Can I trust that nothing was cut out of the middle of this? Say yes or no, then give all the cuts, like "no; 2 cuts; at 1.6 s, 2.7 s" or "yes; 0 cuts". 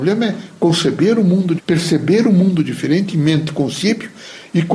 no; 1 cut; at 1.6 s